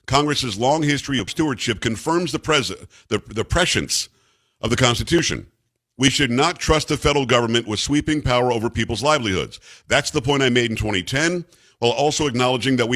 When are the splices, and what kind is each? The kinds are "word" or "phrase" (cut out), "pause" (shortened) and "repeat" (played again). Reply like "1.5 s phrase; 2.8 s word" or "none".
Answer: 1.3 s word